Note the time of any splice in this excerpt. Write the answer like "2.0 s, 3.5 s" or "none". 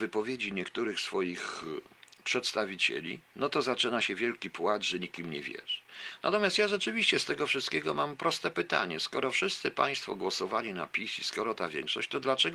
3.3 s

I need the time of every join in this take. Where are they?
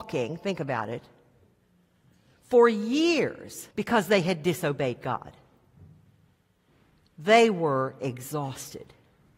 3.7 s

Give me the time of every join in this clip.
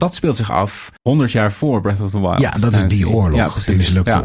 1.0 s

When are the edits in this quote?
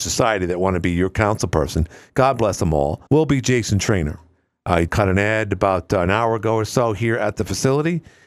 3.1 s, 4.9 s

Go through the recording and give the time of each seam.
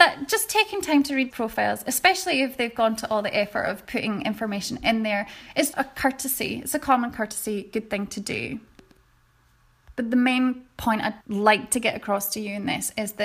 1.3 s, 5.7 s, 9.9 s, 11.2 s

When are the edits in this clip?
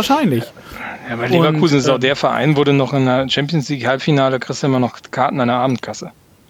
none

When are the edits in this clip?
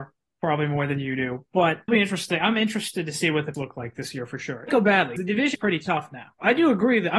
1.9 s, 3.5 s, 4.7 s, 5.2 s, 5.5 s

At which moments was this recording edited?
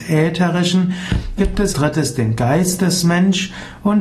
1.4 s, 1.7 s

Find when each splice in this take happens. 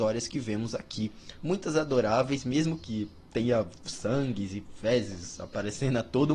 none

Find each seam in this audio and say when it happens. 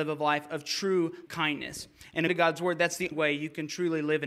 1.3 s, 2.3 s, 3.1 s

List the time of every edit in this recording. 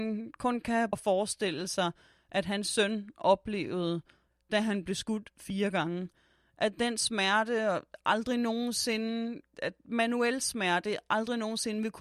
0.9 s, 9.5 s

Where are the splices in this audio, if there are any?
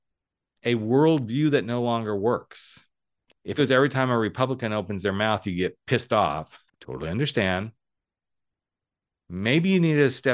3.6 s, 6.7 s

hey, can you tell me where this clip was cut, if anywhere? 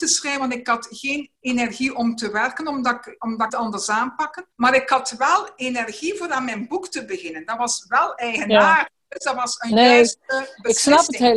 1.4 s, 3.5 s, 4.5 s

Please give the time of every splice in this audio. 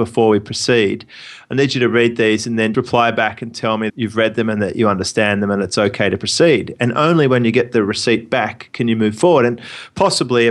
2.7 s, 3.9 s

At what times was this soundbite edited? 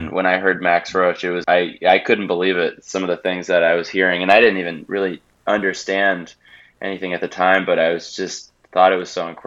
1.4 s

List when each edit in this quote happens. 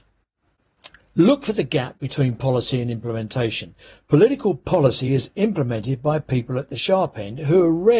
none

